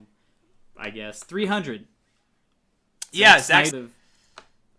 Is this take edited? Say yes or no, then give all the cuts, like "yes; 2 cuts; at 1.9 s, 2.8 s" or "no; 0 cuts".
yes; 1 cut; at 3.7 s